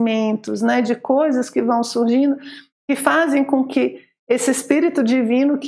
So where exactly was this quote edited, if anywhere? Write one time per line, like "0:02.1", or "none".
none

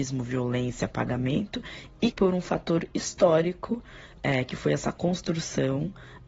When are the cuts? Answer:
0:02.1

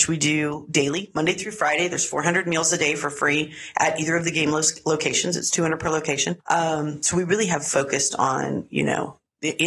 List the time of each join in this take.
none

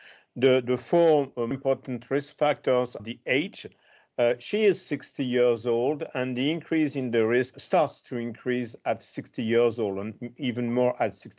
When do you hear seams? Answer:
0:01.5
0:03.0
0:07.5

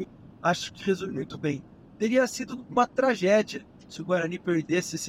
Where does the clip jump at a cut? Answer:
none

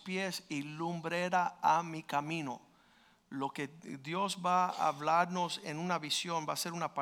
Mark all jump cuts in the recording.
none

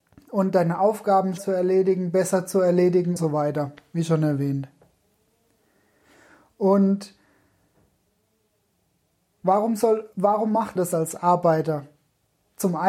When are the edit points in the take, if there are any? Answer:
0:01.4
0:03.2
0:10.1
0:10.8

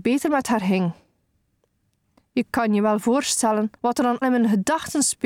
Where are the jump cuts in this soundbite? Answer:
0:03.8
0:04.2

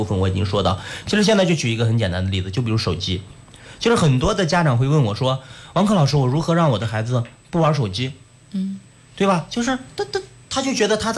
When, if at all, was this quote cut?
none

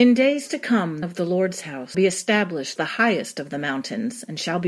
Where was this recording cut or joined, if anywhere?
0:01.0
0:01.9
0:02.8

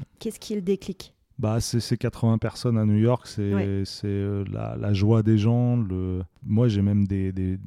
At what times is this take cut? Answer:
0:06.3

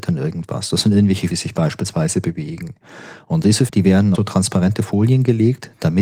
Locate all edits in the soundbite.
0:01.3
0:03.7
0:04.1

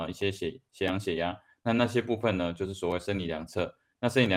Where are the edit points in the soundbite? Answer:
none

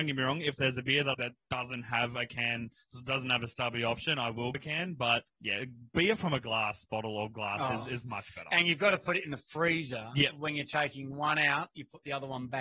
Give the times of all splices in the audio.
0:01.1
0:04.5
0:05.3

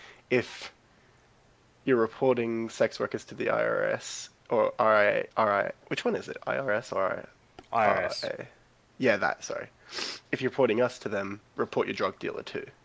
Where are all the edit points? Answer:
0:04.4
0:05.3
0:05.8
0:10.3
0:11.5

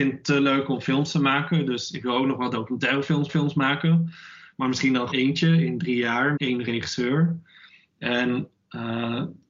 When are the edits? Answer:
0:03.3
0:05.1
0:06.4

